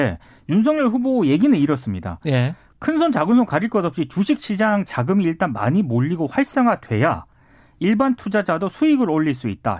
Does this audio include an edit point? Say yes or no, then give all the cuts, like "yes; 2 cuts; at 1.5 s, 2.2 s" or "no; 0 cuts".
yes; 1 cut; at 4.9 s